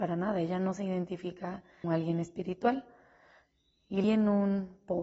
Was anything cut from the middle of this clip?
yes; 2 cuts; at 1.8 s, 4.0 s

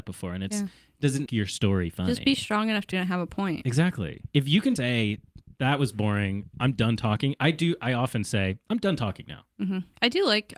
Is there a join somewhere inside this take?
yes; 3 cuts; at 1.3 s, 2.9 s, 4.8 s

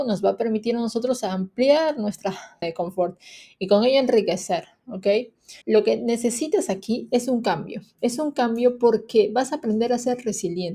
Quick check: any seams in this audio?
yes; 2 cuts; at 2.6 s, 5.6 s

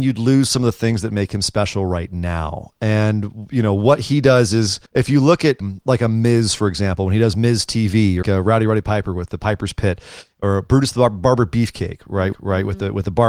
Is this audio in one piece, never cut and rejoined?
no; 4 cuts; at 4.9 s, 5.6 s, 8.2 s, 12.3 s

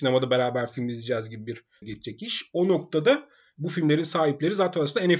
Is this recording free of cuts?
no; 1 cut; at 1.8 s

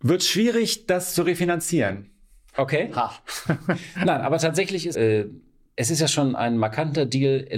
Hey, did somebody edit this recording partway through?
yes; 1 cut; at 4.9 s

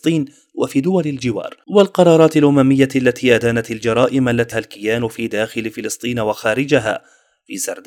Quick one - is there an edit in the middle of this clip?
yes; 2 cuts; at 1.6 s, 4.5 s

